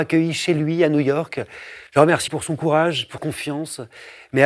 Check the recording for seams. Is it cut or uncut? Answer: cut